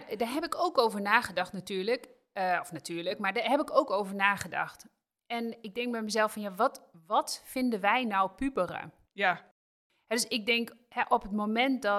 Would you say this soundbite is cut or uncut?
uncut